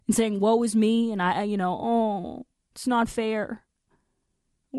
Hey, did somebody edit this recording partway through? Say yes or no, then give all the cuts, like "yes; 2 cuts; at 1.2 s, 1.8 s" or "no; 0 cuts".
no; 0 cuts